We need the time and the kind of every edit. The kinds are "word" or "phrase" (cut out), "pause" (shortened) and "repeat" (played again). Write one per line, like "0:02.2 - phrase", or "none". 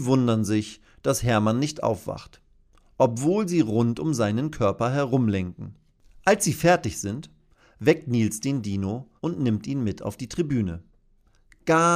0:09.2 - pause

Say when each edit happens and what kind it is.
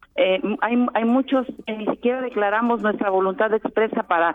none

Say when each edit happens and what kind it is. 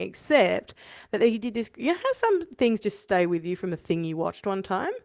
none

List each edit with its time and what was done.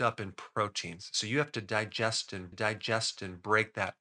0:02.5 - repeat

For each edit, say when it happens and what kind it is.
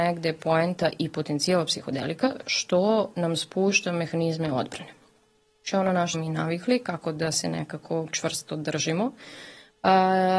0:06.1 - word

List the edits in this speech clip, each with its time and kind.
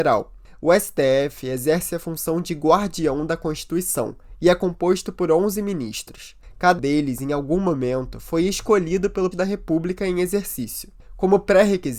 0:06.8 - word
0:09.3 - word

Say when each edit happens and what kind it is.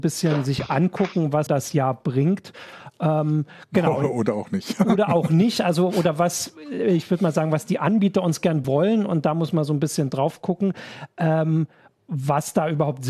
0:01.5 - word
0:08.6 - word

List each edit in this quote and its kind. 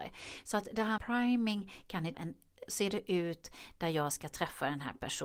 0:01.0 - word
0:02.1 - word
0:02.7 - phrase

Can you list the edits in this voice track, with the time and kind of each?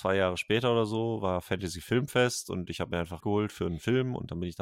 0:03.2 - phrase

